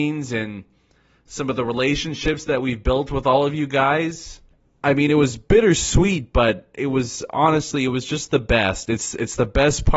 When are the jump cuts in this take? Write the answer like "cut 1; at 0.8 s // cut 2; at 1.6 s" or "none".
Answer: cut 1; at 4.5 s